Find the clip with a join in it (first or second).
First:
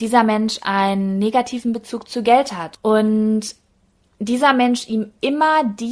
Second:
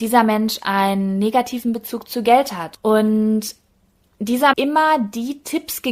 second